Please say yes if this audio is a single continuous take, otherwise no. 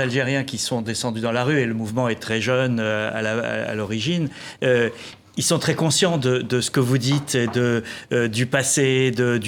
yes